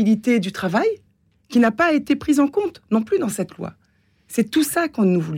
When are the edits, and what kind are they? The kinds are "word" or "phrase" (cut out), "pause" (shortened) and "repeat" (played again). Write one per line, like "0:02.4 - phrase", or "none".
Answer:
none